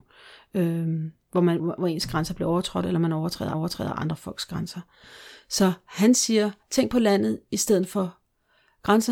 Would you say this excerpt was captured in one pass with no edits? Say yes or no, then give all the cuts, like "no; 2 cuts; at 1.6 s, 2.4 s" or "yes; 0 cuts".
no; 3 cuts; at 1.6 s, 3.5 s, 6.6 s